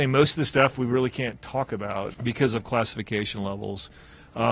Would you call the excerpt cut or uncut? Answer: uncut